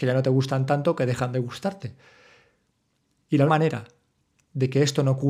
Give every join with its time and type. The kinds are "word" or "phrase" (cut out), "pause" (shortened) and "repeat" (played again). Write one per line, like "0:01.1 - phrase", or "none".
0:03.5 - word